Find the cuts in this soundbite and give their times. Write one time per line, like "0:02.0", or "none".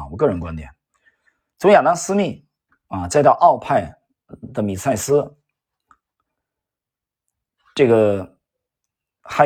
none